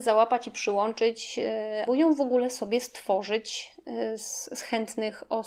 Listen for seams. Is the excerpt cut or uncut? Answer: cut